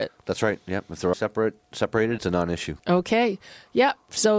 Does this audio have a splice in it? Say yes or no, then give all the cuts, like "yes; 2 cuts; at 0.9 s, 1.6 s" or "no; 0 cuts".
yes; 3 cuts; at 1.1 s, 2.2 s, 2.8 s